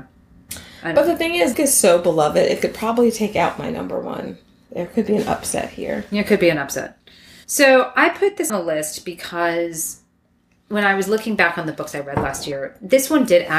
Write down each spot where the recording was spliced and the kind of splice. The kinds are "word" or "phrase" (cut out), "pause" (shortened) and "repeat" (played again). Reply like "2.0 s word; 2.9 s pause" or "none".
1.5 s phrase; 8.5 s word